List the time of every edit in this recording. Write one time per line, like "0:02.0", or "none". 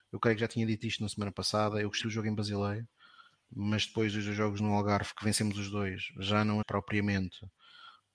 0:02.0
0:06.6